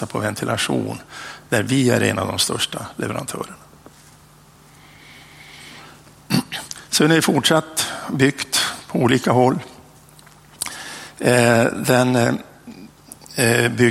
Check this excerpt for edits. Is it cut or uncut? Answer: uncut